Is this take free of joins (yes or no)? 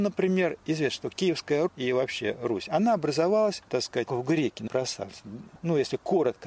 no